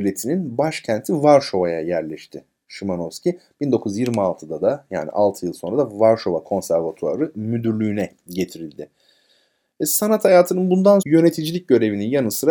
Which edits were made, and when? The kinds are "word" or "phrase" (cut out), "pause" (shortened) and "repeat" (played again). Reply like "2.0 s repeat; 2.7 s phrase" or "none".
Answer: 11.0 s word